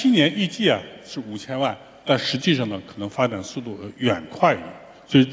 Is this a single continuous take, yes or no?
yes